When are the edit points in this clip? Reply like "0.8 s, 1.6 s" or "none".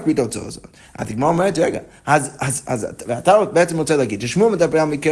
none